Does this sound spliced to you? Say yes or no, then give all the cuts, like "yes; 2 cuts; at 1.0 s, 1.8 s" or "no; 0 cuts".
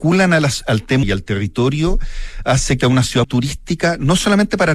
yes; 3 cuts; at 1.0 s, 2.8 s, 3.2 s